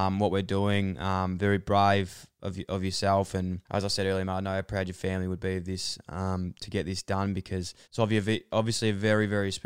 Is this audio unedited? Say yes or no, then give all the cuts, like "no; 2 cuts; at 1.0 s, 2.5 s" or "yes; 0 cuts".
no; 2 cuts; at 3.7 s, 7.8 s